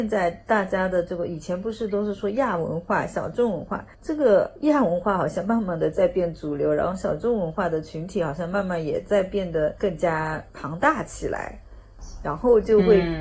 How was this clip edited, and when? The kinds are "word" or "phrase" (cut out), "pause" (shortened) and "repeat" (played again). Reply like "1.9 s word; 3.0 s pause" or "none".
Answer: 3.9 s pause; 10.5 s pause